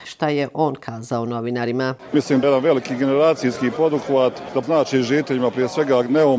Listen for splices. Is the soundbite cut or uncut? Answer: cut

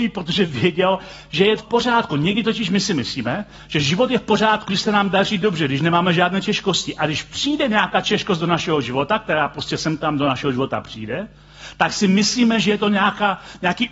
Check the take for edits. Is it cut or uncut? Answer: cut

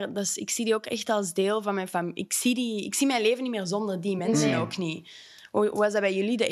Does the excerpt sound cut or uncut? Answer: uncut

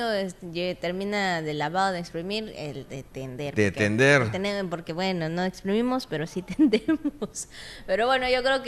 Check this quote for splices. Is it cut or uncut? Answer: uncut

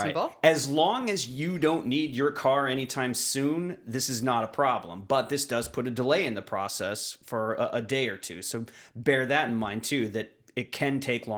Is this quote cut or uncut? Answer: uncut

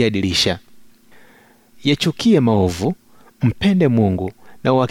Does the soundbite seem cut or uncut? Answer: uncut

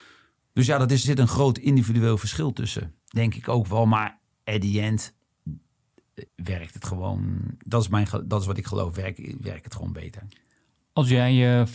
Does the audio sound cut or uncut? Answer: cut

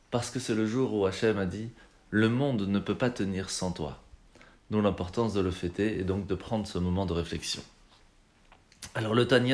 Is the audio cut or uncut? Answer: uncut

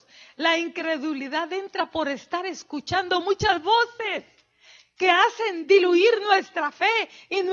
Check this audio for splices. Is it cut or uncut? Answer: uncut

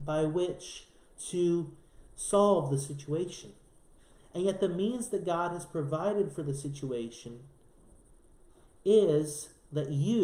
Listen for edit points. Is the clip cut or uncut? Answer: uncut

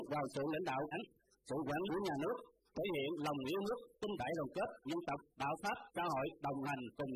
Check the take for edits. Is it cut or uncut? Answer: cut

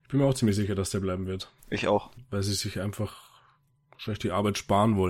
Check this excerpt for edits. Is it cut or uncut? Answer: cut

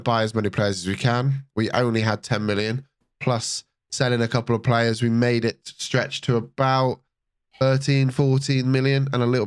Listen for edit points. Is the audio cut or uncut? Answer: uncut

